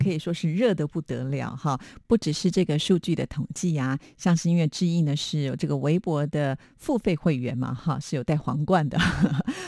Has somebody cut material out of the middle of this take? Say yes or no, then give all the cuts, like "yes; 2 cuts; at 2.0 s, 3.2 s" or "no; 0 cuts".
no; 0 cuts